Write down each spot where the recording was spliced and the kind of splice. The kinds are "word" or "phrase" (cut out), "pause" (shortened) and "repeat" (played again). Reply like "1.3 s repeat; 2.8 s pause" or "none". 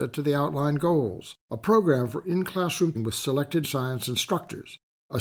1.4 s pause; 2.9 s word; 3.6 s word